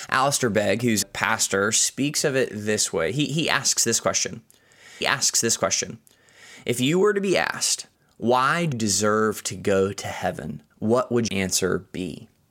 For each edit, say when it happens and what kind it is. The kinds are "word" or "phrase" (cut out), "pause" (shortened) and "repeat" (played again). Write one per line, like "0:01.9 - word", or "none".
0:01.0 - word
0:05.0 - repeat
0:07.9 - pause
0:08.7 - word
0:10.7 - pause
0:11.3 - word